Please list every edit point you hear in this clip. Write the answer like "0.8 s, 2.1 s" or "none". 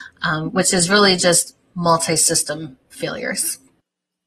none

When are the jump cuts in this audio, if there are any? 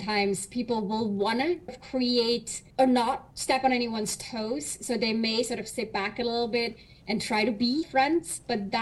1.7 s, 2.7 s, 3.3 s, 7.8 s

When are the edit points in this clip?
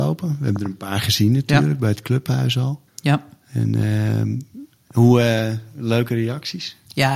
2.9 s, 4.7 s

